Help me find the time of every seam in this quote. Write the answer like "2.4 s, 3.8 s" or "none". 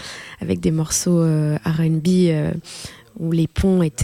none